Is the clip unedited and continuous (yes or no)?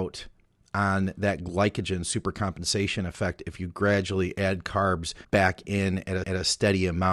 no